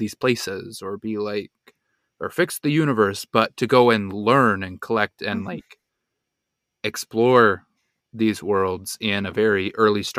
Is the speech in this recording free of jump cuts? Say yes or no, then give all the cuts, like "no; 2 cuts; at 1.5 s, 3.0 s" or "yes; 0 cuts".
yes; 0 cuts